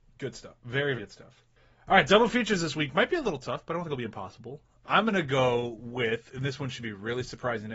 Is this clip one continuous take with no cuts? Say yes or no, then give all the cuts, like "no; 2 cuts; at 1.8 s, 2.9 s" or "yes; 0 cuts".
no; 1 cut; at 1.0 s